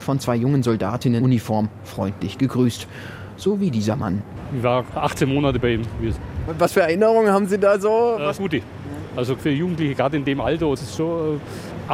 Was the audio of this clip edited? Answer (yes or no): yes